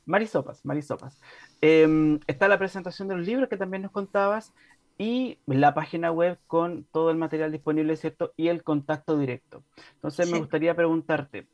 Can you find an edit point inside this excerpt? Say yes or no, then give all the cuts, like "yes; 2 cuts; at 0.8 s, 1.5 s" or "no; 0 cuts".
no; 0 cuts